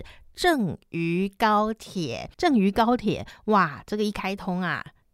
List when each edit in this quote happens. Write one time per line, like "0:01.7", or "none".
0:02.3